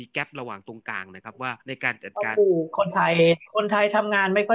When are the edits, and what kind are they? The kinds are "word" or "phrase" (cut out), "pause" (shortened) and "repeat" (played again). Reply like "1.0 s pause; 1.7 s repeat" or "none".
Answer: 1.6 s pause